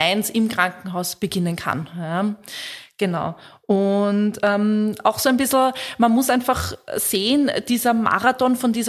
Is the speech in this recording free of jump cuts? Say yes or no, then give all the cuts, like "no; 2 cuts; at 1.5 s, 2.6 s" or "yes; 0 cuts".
yes; 0 cuts